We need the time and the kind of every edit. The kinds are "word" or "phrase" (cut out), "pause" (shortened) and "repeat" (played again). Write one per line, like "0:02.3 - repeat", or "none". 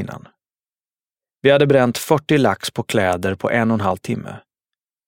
none